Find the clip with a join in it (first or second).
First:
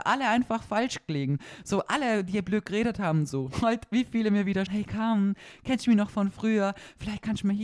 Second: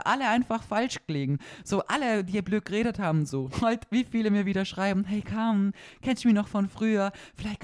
first